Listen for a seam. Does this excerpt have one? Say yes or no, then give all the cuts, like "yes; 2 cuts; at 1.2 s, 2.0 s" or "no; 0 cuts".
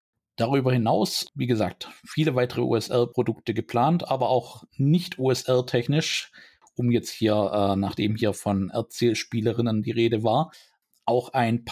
no; 0 cuts